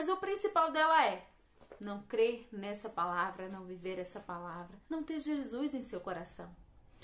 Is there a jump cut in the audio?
yes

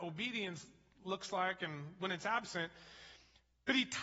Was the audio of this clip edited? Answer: no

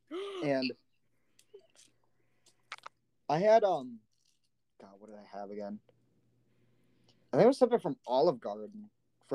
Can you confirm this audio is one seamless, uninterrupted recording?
yes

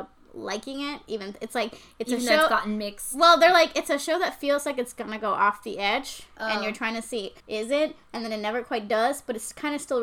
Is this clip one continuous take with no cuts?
no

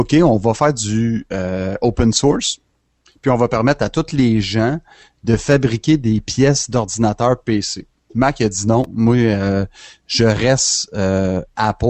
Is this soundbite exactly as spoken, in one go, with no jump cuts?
yes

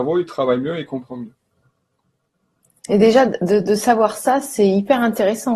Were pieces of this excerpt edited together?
no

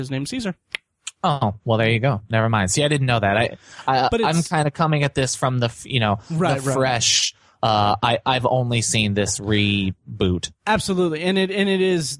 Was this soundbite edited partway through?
no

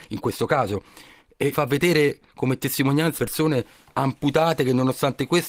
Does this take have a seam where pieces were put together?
yes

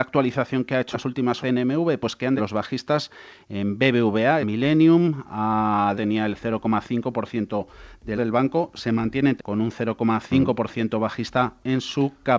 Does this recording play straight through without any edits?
no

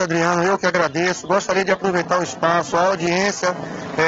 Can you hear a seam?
no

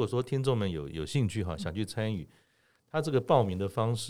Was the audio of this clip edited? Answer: no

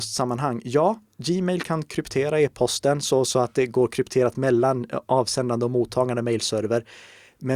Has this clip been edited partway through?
no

